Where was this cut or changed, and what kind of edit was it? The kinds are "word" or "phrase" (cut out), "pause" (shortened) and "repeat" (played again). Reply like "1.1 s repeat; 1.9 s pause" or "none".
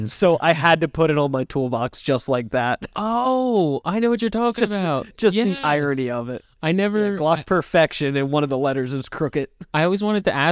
none